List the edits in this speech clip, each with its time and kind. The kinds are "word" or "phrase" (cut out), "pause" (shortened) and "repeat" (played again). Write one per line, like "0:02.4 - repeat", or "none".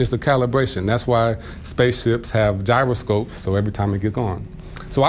0:04.1 - phrase